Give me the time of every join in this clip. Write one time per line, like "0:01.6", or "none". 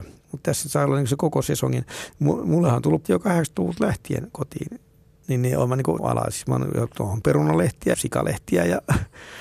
0:03.0
0:06.0
0:07.2
0:07.9